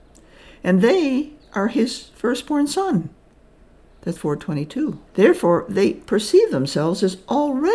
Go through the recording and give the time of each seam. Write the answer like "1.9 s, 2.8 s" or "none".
4.2 s, 5.1 s